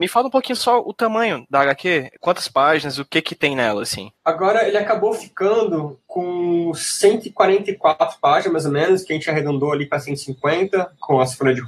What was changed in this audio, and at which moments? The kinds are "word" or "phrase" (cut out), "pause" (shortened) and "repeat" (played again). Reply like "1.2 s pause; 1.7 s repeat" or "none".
6.1 s pause